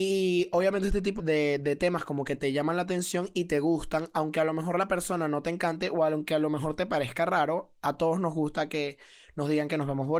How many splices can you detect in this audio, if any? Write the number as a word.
one